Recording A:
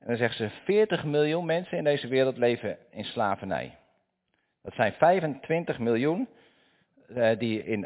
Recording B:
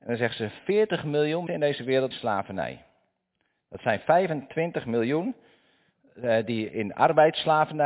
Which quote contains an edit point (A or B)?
B